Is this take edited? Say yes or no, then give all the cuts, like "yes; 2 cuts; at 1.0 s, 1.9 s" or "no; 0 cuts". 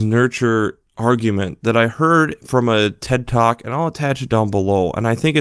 no; 0 cuts